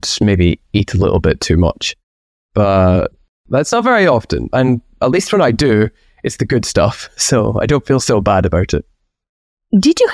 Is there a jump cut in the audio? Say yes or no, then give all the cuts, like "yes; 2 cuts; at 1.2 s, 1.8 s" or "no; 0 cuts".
no; 0 cuts